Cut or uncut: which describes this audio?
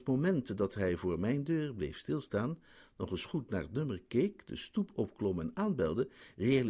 uncut